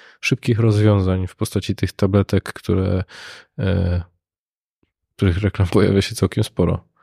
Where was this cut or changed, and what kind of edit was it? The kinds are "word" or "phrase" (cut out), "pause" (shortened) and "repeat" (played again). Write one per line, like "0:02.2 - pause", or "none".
none